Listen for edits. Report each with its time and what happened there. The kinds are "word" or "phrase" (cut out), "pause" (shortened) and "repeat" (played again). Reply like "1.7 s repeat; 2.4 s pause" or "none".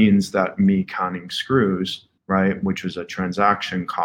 2.2 s pause